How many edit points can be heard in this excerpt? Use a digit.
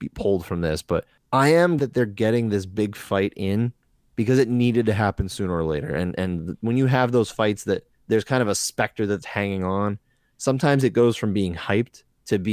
2